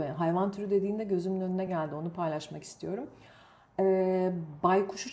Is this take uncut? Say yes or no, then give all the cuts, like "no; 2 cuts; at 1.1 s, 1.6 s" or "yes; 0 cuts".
yes; 0 cuts